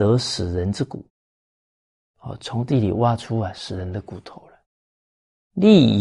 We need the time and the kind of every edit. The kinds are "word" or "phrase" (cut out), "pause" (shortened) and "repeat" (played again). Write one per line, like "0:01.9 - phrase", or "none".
none